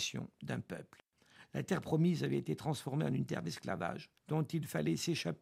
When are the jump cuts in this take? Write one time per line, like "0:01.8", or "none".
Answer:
0:04.2